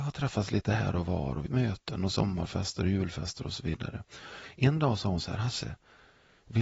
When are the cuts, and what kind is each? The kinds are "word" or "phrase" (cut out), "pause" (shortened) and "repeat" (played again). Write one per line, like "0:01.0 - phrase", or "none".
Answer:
0:01.5 - phrase